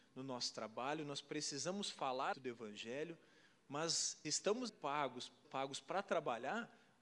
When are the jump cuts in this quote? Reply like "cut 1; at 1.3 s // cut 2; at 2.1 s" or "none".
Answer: cut 1; at 2.3 s // cut 2; at 4.2 s // cut 3; at 4.7 s // cut 4; at 5.4 s